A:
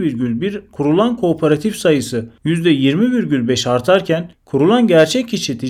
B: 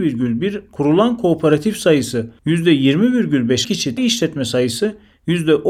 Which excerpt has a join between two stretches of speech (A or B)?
B